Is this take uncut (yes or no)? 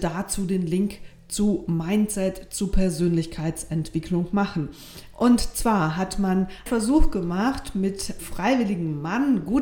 no